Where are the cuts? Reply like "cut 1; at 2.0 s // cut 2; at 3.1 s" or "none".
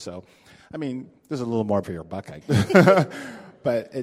cut 1; at 1.2 s // cut 2; at 1.8 s // cut 3; at 2.4 s